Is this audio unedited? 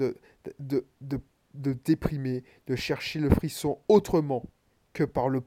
yes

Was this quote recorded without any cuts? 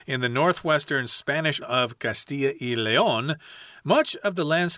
no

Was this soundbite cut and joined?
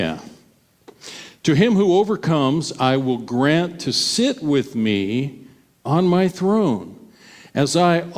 no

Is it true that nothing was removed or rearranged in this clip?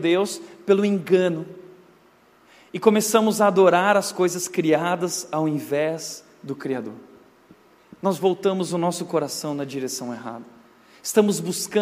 yes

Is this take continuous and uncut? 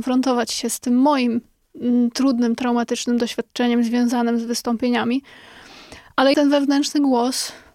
no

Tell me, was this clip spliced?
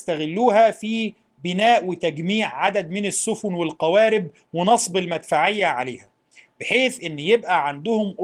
no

